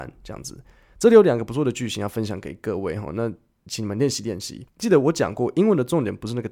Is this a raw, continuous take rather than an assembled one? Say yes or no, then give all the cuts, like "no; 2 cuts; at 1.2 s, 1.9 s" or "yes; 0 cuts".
no; 1 cut; at 4.7 s